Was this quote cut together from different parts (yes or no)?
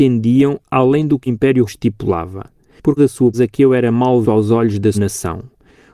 yes